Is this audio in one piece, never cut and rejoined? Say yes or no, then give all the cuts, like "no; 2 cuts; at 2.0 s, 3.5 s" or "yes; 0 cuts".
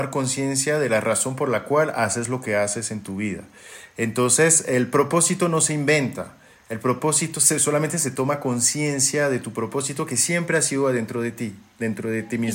yes; 0 cuts